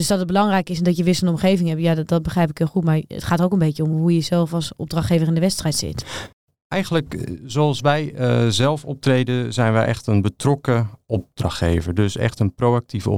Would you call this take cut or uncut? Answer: uncut